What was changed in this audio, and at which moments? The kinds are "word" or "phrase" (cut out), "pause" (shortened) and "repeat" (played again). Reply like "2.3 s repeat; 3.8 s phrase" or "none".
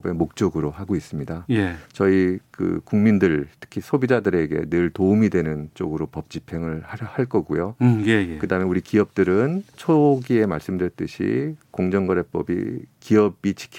1.9 s pause; 9.7 s word